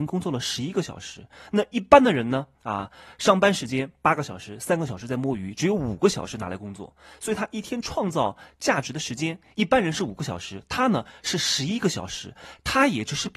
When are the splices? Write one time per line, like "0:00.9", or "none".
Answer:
0:02.5